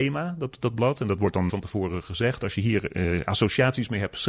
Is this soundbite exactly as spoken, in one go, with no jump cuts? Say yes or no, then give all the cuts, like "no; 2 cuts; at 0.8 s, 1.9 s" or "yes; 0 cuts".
no; 1 cut; at 1.5 s